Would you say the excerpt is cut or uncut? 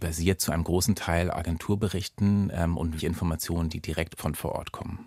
cut